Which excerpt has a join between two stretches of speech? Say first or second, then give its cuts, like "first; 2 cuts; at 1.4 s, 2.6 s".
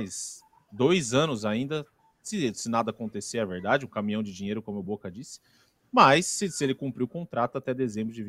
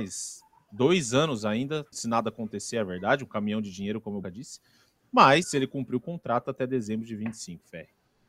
second; 3 cuts; at 1.9 s, 4.2 s, 5.4 s